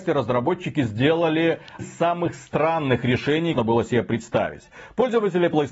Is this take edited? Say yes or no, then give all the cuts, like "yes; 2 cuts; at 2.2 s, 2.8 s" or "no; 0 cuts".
yes; 2 cuts; at 1.8 s, 3.5 s